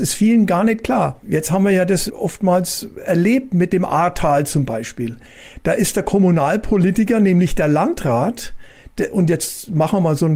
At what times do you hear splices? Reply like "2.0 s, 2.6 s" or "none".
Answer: 2.1 s